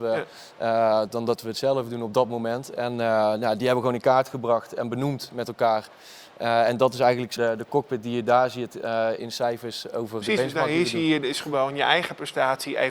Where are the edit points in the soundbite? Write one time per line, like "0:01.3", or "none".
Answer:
0:07.4
0:09.2
0:10.2

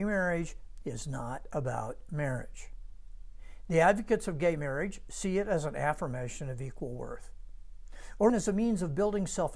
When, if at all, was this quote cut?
0:08.3

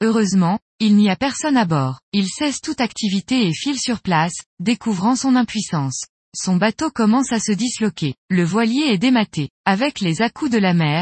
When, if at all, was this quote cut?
0:02.0
0:06.2
0:08.2

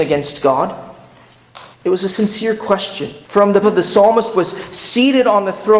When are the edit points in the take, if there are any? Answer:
0:01.7
0:03.2
0:03.6
0:04.3

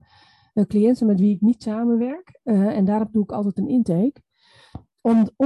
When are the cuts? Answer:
none

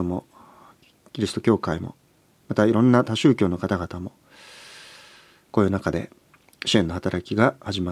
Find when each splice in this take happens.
none

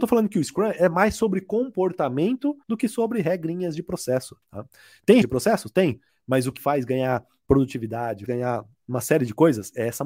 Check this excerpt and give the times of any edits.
0:02.6
0:04.4
0:05.2
0:06.1
0:06.6
0:08.3

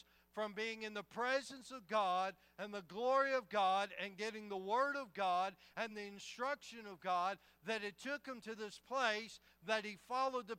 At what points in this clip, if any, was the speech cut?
none

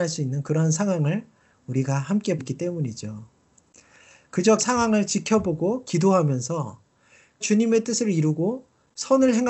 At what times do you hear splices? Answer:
0:02.4
0:04.6
0:07.4

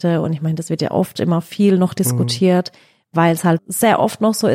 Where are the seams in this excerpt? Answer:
0:03.6

